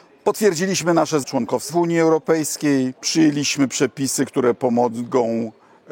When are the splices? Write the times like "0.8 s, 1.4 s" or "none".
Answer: 1.2 s, 1.7 s, 3.0 s